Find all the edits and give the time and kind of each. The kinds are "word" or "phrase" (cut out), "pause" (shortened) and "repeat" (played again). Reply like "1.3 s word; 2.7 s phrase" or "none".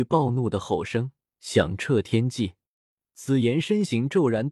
none